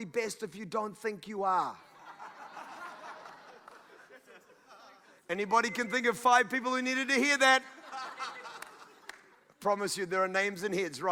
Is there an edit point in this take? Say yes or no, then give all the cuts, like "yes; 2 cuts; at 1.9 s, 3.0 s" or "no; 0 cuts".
no; 0 cuts